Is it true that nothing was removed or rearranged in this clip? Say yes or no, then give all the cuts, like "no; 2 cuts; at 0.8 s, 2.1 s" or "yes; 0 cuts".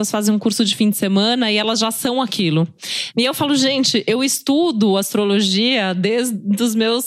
yes; 0 cuts